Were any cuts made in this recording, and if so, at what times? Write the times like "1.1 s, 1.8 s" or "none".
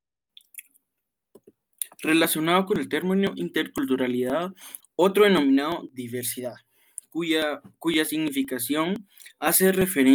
4.8 s